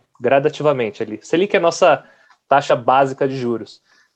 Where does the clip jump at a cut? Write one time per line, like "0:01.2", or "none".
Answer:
none